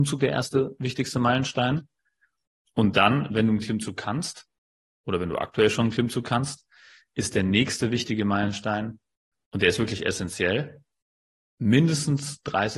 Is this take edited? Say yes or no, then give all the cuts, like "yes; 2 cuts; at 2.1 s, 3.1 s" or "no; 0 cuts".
no; 0 cuts